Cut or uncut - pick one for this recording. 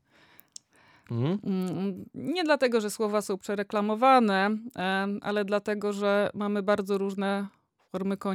uncut